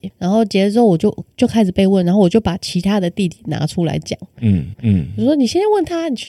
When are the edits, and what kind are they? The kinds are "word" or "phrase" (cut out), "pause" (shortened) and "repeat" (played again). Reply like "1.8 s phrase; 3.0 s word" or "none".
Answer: 4.7 s repeat